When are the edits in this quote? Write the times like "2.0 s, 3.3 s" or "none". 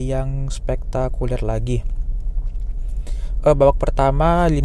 none